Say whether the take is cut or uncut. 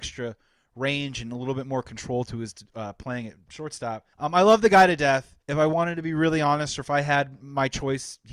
cut